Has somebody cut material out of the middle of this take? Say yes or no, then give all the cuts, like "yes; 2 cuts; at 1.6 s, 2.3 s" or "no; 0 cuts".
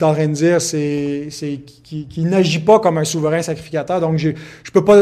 no; 0 cuts